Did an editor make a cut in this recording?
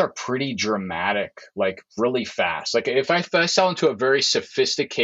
yes; 1 cut; at 1.9 s

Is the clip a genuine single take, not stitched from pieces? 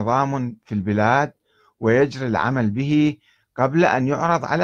yes; 0 cuts

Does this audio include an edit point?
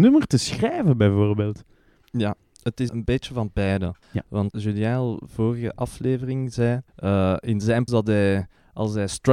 yes; 5 cuts; at 2.9 s, 4.0 s, 4.5 s, 6.9 s, 7.9 s

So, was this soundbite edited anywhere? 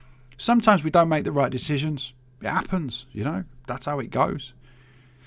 no; 0 cuts

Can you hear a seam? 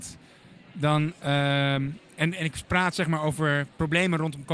no; 0 cuts

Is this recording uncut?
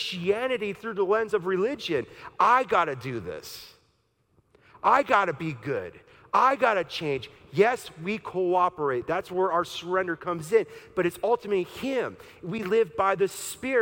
yes; 0 cuts

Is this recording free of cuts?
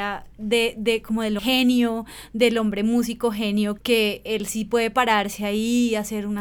no; 2 cuts; at 1.4 s, 3.8 s

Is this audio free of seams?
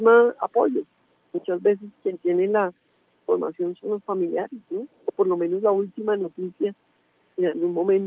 yes; 0 cuts

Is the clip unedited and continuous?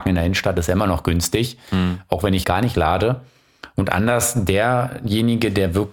no; 1 cut; at 2.4 s

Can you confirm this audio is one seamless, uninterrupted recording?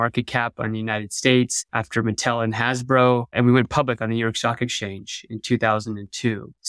yes; 0 cuts

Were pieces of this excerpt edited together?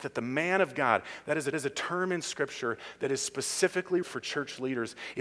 yes; 2 cuts; at 1.5 s, 4.0 s

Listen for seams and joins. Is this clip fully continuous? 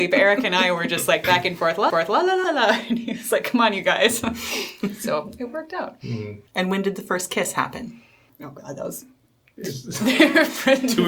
no; 4 cuts; at 1.9 s, 2.4 s, 6.5 s, 8.3 s

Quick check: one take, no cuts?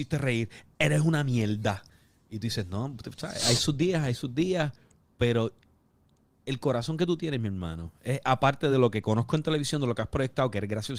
yes; 0 cuts

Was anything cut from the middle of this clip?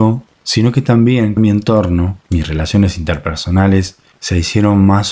yes; 3 cuts; at 1.4 s, 2.2 s, 4.1 s

